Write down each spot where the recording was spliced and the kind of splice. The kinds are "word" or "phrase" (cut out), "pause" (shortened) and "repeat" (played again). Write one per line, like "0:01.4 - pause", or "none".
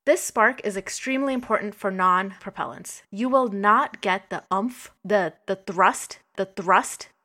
0:02.4 - word
0:05.0 - pause
0:06.3 - repeat